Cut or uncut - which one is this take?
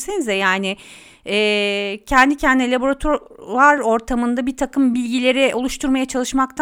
uncut